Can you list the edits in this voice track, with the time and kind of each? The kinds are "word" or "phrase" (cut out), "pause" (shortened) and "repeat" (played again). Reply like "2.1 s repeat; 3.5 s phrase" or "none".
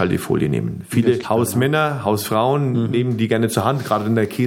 1.2 s word